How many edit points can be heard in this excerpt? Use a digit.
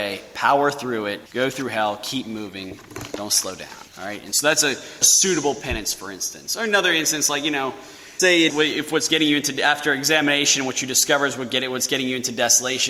5